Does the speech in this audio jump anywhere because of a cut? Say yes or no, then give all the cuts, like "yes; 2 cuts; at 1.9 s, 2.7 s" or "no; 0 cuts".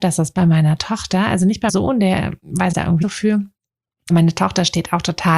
yes; 4 cuts; at 1.7 s, 2.7 s, 3.0 s, 4.1 s